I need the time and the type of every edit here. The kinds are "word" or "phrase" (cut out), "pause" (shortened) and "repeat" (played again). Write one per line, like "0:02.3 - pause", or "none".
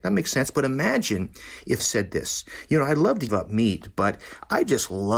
0:01.8 - word
0:03.3 - word